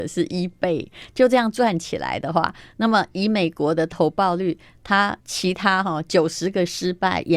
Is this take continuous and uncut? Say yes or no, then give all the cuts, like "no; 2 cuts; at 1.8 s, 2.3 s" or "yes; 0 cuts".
no; 1 cut; at 5.2 s